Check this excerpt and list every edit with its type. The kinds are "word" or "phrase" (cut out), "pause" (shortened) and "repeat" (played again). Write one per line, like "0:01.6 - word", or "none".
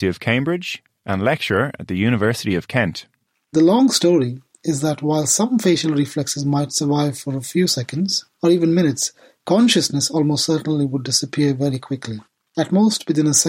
0:08.3 - pause